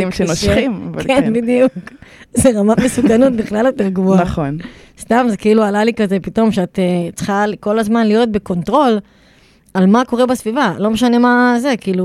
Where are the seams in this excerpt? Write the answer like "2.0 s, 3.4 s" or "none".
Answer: none

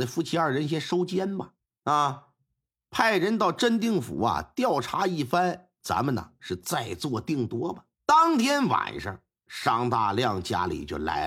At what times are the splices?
1.6 s, 7.9 s

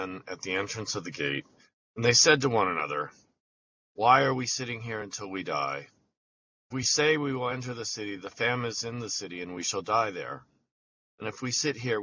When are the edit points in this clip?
none

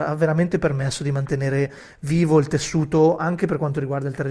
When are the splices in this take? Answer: none

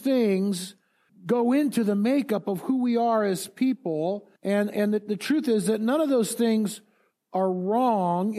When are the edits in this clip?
1.1 s, 4.4 s

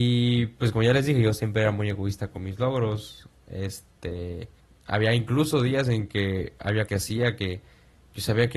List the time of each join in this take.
4.6 s, 6.9 s

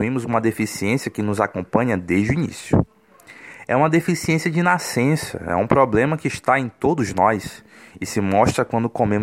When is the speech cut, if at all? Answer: none

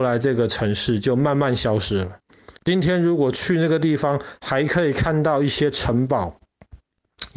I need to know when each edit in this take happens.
2.6 s

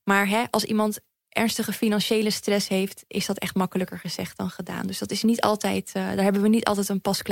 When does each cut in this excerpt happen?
none

